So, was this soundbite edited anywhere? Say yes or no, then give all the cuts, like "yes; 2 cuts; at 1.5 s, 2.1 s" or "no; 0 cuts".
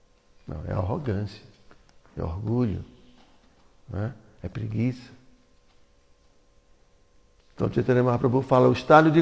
no; 0 cuts